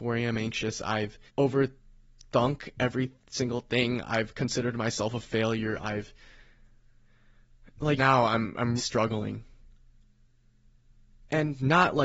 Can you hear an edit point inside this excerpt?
yes; 3 cuts; at 1.3 s, 8.0 s, 8.8 s

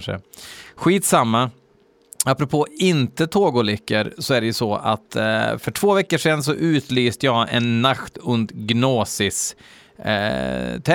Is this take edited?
no; 0 cuts

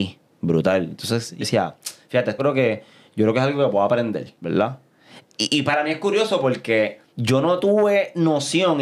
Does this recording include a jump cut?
yes; 4 cuts; at 1.4 s, 2.4 s, 4.4 s, 7.1 s

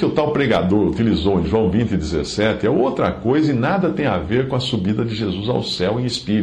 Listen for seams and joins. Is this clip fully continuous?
yes; 0 cuts

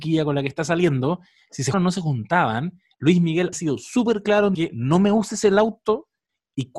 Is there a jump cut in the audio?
yes; 3 cuts; at 1.7 s, 3.5 s, 4.5 s

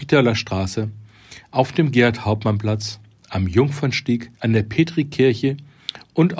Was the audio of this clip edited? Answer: yes; 1 cut; at 4.3 s

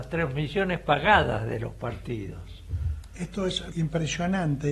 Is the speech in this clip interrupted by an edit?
yes; 1 cut; at 3.7 s

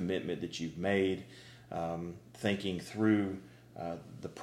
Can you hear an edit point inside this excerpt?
no; 0 cuts

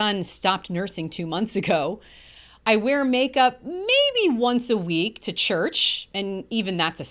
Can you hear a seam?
no; 0 cuts

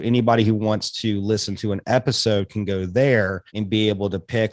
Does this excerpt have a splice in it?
yes; 1 cut; at 3.5 s

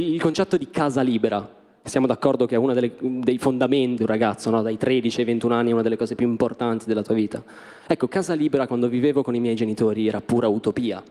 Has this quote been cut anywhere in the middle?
yes; 1 cut; at 4.0 s

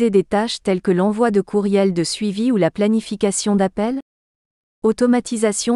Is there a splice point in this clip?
no; 0 cuts

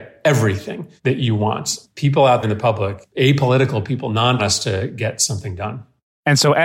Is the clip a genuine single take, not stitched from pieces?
no; 3 cuts; at 1.0 s, 2.4 s, 4.4 s

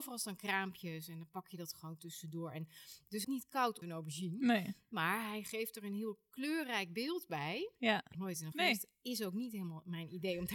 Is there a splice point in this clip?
yes; 4 cuts; at 3.2 s, 3.8 s, 8.1 s, 8.5 s

